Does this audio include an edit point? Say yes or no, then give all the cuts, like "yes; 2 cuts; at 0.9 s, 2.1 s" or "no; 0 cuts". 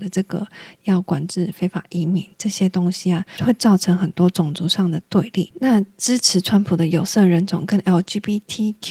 yes; 1 cut; at 2.3 s